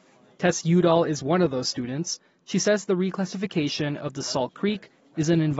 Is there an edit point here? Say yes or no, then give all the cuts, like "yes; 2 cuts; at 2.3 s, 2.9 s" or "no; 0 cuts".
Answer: no; 0 cuts